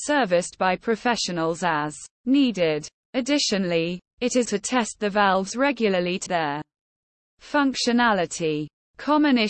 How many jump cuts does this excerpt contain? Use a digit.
3